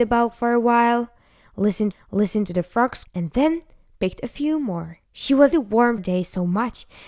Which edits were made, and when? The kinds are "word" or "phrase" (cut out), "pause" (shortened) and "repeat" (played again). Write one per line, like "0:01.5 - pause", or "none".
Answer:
0:01.9 - repeat
0:03.0 - word
0:05.0 - pause
0:05.5 - word
0:06.0 - word